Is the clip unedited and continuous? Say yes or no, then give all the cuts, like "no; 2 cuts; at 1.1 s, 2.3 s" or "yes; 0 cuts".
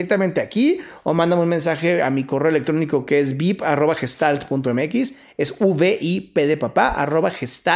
yes; 0 cuts